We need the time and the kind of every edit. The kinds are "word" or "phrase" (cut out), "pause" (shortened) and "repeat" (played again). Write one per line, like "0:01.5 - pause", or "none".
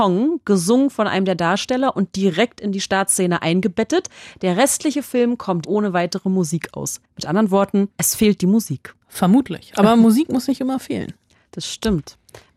0:05.6 - word
0:07.1 - pause
0:07.9 - pause
0:09.0 - pause